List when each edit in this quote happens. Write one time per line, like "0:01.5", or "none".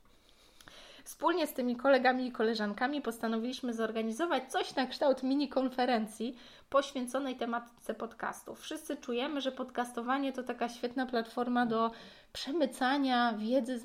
none